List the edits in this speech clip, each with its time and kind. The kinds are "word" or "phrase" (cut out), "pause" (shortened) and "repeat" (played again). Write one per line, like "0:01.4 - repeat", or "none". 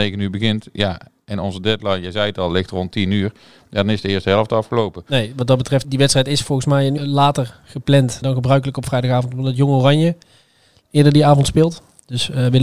0:05.8 - word
0:07.0 - word
0:08.2 - word